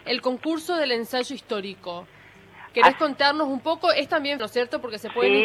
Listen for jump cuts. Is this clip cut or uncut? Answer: cut